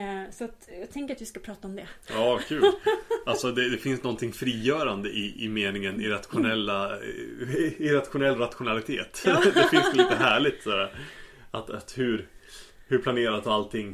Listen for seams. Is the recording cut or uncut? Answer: uncut